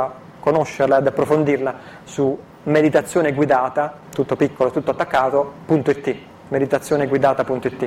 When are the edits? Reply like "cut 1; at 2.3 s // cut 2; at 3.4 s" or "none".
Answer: cut 1; at 4.0 s